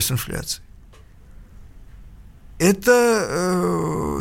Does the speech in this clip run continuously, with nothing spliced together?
yes; 0 cuts

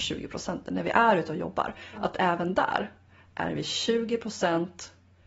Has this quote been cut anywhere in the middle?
no; 0 cuts

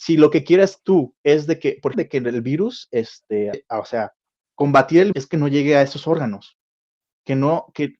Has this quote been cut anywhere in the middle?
yes; 4 cuts; at 1.9 s, 3.5 s, 4.2 s, 5.1 s

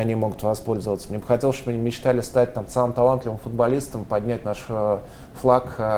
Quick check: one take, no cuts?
yes; 0 cuts

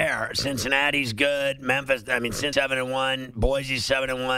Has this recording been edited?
yes; 1 cut; at 2.5 s

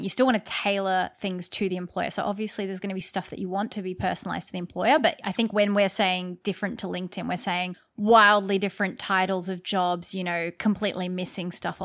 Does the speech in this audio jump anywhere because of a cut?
no; 0 cuts

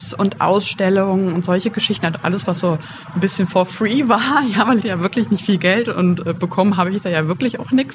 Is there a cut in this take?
yes; 1 cut; at 4.8 s

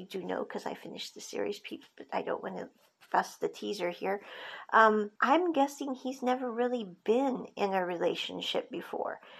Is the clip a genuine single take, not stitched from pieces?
no; 1 cut; at 5.2 s

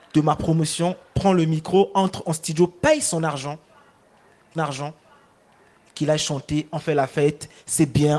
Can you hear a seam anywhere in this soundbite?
yes; 1 cut; at 4.6 s

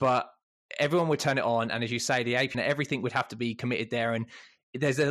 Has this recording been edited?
yes; 1 cut; at 2.5 s

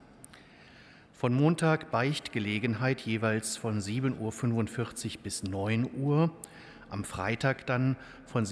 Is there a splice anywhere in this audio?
yes; 1 cut; at 1.9 s

